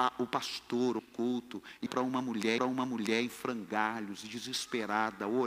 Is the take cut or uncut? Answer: cut